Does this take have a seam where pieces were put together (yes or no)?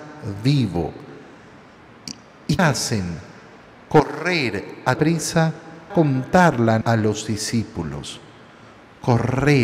yes